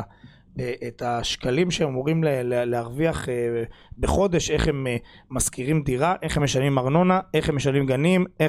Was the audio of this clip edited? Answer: no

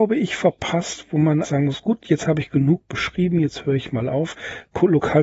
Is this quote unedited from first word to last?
no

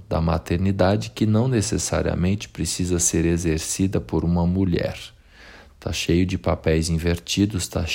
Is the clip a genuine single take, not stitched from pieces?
yes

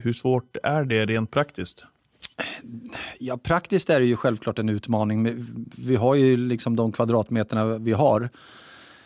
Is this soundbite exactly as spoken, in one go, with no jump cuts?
yes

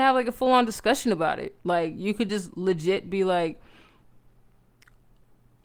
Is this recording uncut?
yes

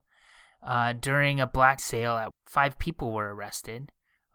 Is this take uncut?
no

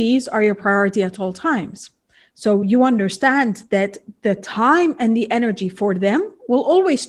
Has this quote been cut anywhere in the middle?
no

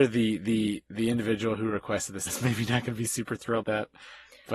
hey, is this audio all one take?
no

